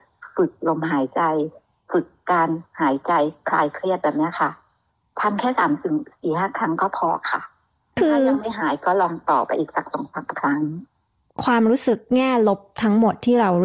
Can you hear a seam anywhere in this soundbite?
no; 0 cuts

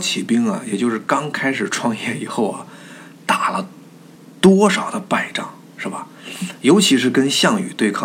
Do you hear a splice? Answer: yes; 1 cut; at 4.1 s

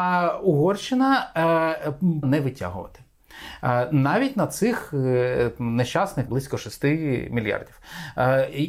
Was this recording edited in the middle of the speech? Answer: yes; 2 cuts; at 2.2 s, 6.3 s

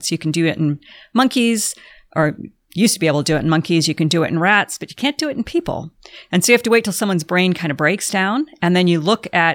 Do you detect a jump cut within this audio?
no; 0 cuts

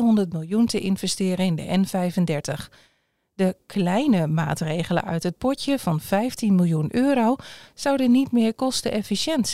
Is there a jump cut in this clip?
no; 0 cuts

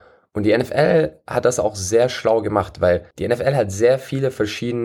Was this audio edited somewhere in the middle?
yes; 1 cut; at 3.1 s

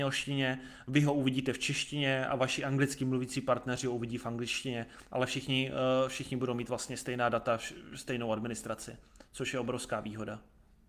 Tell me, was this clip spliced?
yes; 1 cut; at 9.2 s

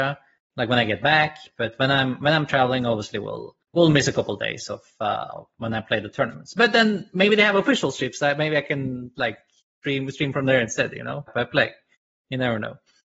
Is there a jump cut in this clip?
yes; 2 cuts; at 3.6 s, 11.3 s

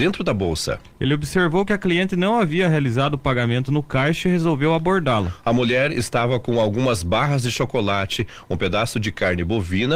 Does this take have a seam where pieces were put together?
no; 0 cuts

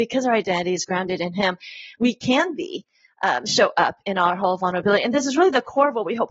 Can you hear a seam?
no; 0 cuts

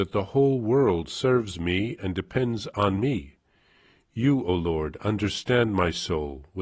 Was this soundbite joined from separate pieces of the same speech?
no; 0 cuts

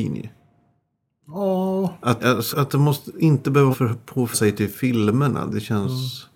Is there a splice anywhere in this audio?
yes; 4 cuts; at 2.2 s, 2.5 s, 3.7 s, 4.3 s

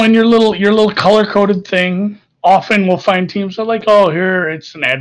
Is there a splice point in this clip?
no; 0 cuts

